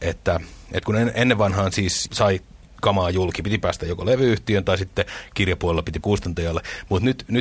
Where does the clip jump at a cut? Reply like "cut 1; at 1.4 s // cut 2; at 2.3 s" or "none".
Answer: cut 1; at 2.1 s // cut 2; at 6.0 s